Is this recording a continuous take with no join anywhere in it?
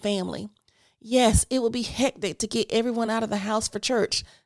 yes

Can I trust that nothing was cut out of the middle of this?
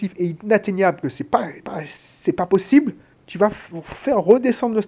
no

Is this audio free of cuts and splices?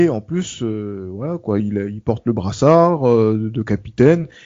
no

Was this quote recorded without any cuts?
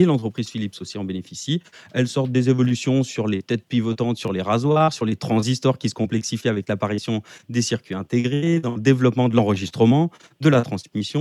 yes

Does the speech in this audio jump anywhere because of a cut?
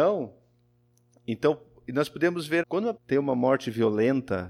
yes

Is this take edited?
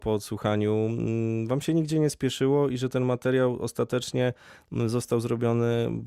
no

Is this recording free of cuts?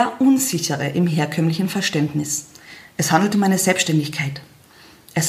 no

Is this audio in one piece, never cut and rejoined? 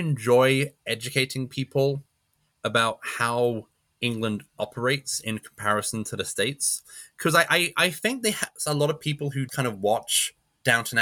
no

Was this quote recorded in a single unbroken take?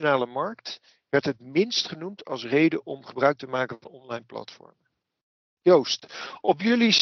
yes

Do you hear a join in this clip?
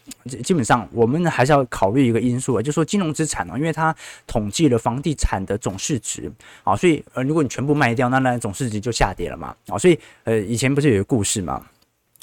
no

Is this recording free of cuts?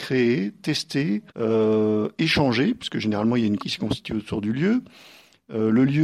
no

